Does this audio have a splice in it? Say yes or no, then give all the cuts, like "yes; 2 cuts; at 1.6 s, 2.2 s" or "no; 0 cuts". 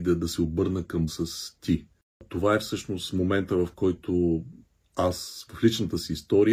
yes; 1 cut; at 1.1 s